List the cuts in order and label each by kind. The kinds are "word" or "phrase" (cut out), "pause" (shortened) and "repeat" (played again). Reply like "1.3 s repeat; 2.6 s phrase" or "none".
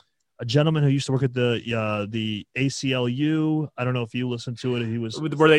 none